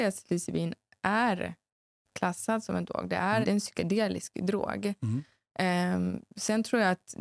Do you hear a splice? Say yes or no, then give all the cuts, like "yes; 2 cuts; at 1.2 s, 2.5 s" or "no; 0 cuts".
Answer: yes; 1 cut; at 3.4 s